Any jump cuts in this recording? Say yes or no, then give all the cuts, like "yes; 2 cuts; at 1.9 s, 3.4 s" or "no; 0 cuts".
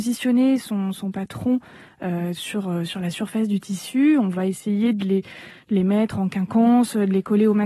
no; 0 cuts